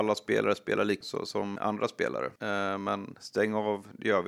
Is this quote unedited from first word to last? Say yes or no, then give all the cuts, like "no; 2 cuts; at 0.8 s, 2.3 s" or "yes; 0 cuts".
no; 3 cuts; at 1.0 s, 1.6 s, 2.4 s